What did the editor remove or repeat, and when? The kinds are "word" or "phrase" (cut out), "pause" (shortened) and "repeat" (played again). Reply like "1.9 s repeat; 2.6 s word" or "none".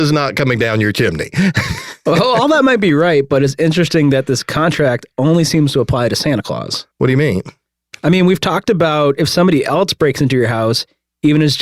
6.9 s pause

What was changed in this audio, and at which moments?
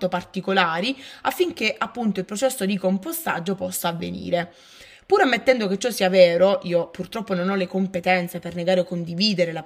none

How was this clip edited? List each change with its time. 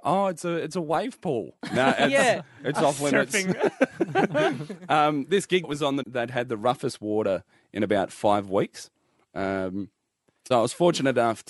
5.6 s word; 6.0 s word; 10.5 s word

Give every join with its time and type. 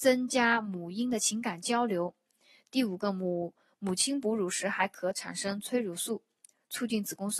none

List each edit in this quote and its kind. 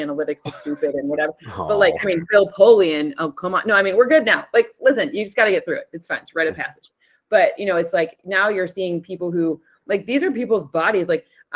none

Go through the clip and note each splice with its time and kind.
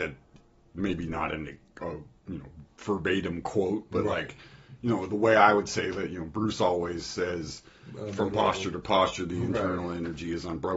none

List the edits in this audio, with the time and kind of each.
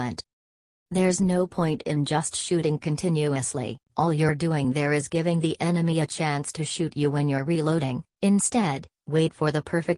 3.9 s pause; 8.1 s pause

